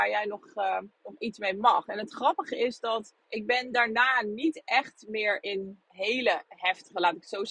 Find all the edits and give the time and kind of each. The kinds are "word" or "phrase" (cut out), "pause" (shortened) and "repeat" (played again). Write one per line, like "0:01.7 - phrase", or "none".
0:00.9 - pause
0:03.2 - pause
0:05.9 - pause